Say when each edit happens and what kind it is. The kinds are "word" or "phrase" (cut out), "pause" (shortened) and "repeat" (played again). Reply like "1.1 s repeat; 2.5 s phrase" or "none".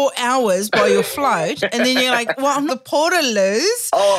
2.7 s phrase

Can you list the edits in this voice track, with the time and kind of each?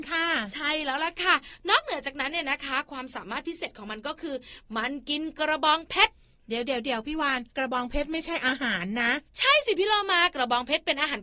7.5 s pause; 9.3 s pause

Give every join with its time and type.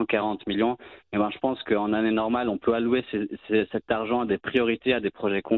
none

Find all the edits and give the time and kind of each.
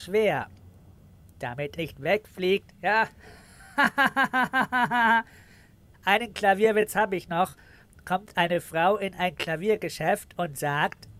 1.8 s word; 5.9 s word

